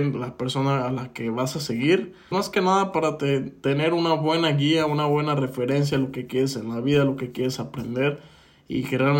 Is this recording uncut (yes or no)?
no